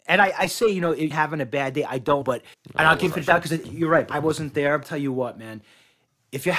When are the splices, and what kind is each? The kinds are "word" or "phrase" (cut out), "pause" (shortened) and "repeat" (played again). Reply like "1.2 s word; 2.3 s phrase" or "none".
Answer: 1.1 s phrase; 2.2 s word; 2.5 s pause; 3.1 s phrase; 3.6 s word; 4.1 s word; 4.8 s word